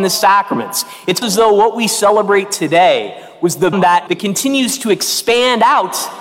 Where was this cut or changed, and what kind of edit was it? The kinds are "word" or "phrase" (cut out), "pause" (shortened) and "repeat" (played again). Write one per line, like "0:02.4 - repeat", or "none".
0:01.2 - word
0:03.7 - phrase
0:04.1 - word